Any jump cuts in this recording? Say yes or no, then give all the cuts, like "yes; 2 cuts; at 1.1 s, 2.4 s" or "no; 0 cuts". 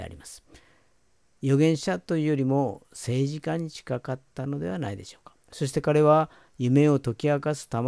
yes; 1 cut; at 5.4 s